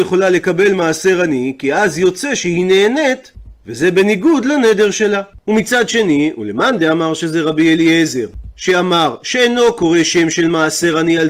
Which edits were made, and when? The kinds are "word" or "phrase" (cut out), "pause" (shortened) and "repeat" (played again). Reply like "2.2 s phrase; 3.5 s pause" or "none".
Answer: none